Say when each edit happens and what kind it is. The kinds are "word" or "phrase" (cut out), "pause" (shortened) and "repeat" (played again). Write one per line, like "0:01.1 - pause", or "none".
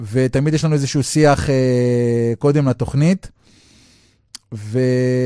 none